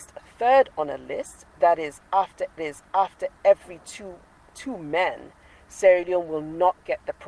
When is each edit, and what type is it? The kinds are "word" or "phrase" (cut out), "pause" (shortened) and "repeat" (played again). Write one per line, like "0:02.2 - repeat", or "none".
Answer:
0:02.6 - repeat